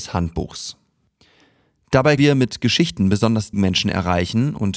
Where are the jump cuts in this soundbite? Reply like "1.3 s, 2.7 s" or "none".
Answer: 2.2 s, 3.5 s